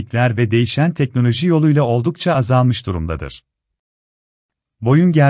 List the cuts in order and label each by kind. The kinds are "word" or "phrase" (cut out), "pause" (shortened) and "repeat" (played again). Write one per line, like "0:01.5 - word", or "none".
none